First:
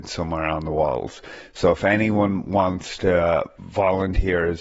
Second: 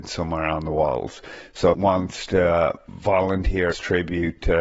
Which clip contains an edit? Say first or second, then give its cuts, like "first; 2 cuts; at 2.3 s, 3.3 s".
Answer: second; 2 cuts; at 1.7 s, 3.7 s